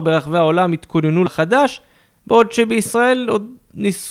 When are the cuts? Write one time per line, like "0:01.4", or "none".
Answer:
0:01.3